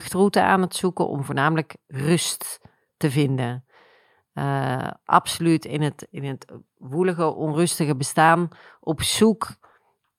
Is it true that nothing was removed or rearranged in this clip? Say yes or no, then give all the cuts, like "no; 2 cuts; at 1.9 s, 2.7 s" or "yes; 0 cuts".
yes; 0 cuts